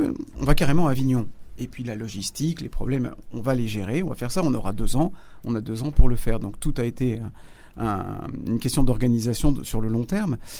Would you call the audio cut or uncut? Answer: uncut